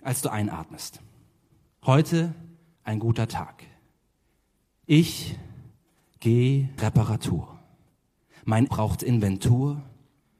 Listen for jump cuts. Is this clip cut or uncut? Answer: cut